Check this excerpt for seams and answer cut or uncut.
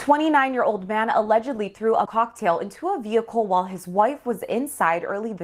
cut